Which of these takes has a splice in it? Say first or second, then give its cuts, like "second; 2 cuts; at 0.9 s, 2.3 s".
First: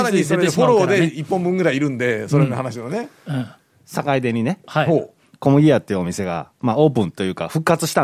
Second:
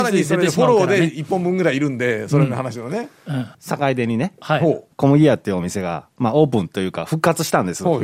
second; 2 cuts; at 3.5 s, 4.9 s